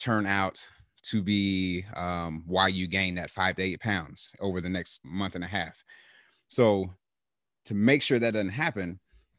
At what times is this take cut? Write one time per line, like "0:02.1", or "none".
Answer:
0:05.0